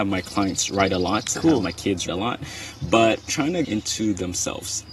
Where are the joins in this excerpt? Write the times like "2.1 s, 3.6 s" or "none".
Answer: 2.1 s, 3.3 s, 3.6 s